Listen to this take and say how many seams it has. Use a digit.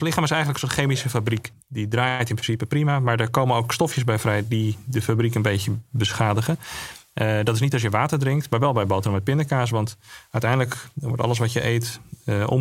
1